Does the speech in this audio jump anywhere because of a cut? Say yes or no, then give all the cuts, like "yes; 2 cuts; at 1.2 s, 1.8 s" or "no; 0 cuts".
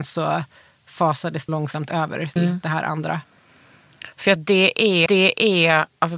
yes; 4 cuts; at 1.5 s, 2.4 s, 4.4 s, 5.1 s